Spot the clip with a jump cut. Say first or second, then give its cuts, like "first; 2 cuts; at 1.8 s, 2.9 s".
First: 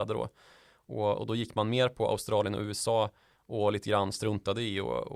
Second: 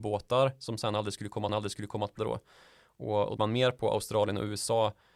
second; 3 cuts; at 1.5 s, 2.2 s, 3.4 s